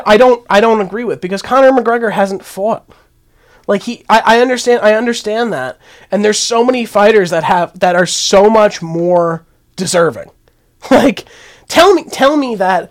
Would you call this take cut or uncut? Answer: uncut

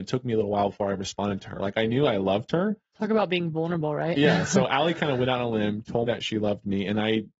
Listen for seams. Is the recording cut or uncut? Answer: cut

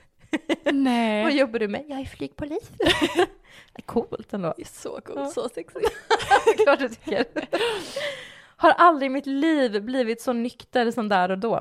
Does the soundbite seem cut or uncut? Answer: uncut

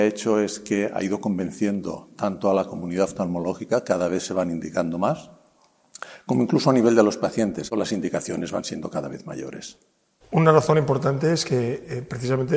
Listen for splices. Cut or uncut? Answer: uncut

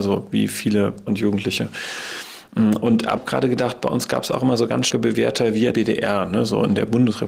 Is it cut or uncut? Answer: cut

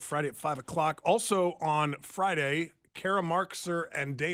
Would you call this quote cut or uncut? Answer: uncut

